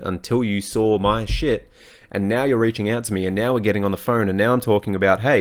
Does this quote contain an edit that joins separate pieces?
no; 0 cuts

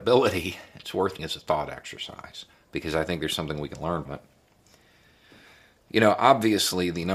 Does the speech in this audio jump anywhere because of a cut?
yes; 3 cuts; at 1.2 s, 2.5 s, 4.1 s

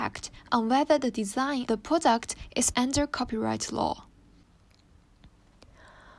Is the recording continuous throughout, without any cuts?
no; 2 cuts; at 1.7 s, 2.7 s

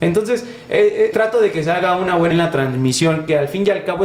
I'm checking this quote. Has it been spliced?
yes; 2 cuts; at 1.1 s, 2.3 s

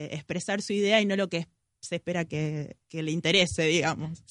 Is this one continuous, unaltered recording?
yes; 0 cuts

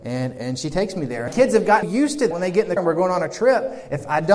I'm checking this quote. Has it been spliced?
yes; 4 cuts; at 1.3 s, 1.8 s, 2.3 s, 2.8 s

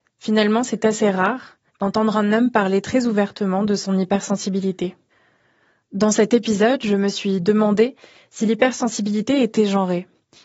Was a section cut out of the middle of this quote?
yes; 1 cut; at 1.7 s

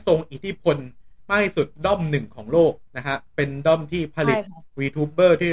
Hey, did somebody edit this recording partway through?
yes; 1 cut; at 2.9 s

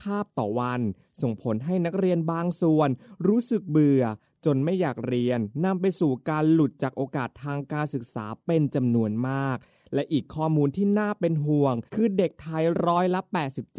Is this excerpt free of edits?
no; 1 cut; at 11.9 s

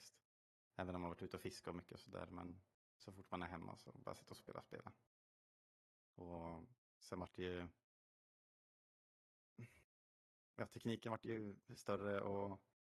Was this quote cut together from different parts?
yes; 1 cut; at 4.4 s

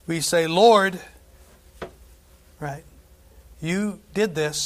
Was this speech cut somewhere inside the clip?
no; 0 cuts

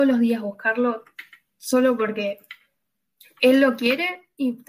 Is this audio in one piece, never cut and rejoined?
yes; 0 cuts

